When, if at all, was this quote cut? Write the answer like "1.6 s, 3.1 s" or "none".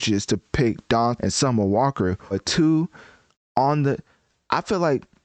1.2 s, 2.3 s

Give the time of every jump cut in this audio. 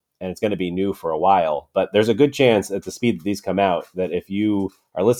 none

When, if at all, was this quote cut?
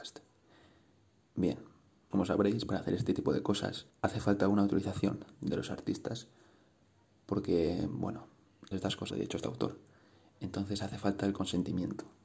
2.1 s, 3.9 s, 8.7 s, 9.1 s

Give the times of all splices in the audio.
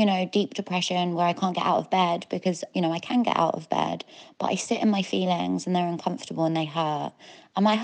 2.7 s

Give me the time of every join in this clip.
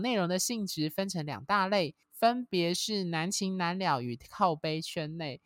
2.0 s

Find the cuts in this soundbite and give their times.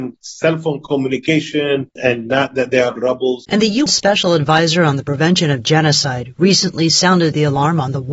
3.0 s, 3.4 s, 3.9 s

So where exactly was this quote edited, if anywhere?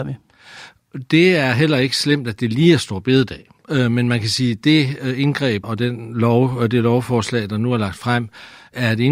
none

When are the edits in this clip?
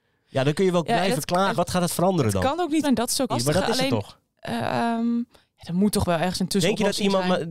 1.5 s, 2.8 s, 3.3 s

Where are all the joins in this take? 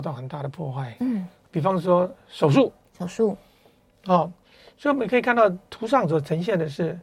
none

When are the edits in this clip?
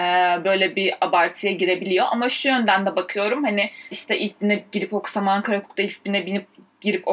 3.9 s

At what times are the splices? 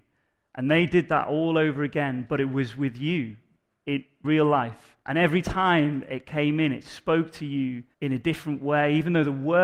4.2 s, 5.0 s, 7.9 s

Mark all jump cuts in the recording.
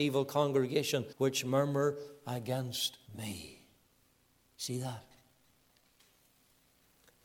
1.1 s, 3.1 s

